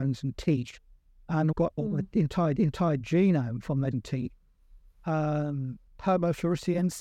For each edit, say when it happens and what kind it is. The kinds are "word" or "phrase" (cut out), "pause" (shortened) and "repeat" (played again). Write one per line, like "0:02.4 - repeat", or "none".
0:01.5 - word
0:02.6 - repeat
0:03.9 - word
0:05.9 - pause